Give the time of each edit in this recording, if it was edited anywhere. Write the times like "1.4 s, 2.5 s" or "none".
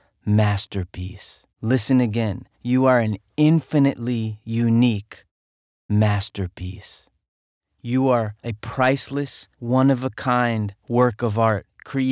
1.5 s, 2.5 s, 9.5 s, 10.8 s